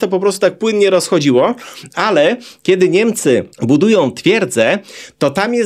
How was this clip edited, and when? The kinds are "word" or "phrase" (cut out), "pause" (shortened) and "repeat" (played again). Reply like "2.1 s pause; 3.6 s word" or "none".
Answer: 3.5 s pause